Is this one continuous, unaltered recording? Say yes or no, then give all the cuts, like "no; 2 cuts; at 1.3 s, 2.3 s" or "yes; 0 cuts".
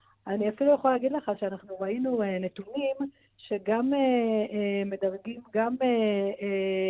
yes; 0 cuts